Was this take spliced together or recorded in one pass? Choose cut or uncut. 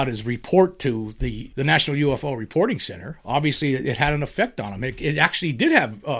cut